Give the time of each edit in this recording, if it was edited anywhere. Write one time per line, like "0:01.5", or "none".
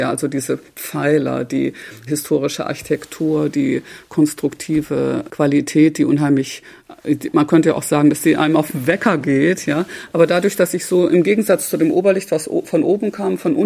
0:02.1
0:05.3